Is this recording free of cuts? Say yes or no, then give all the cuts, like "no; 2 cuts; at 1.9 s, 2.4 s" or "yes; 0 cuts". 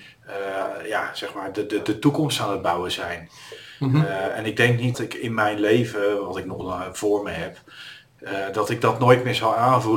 no; 1 cut; at 4.9 s